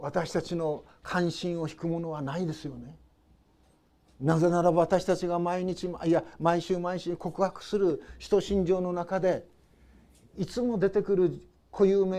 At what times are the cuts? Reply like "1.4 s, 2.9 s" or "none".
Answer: none